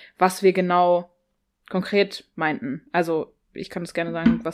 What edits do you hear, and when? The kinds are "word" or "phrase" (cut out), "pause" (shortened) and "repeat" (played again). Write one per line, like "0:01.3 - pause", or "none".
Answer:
none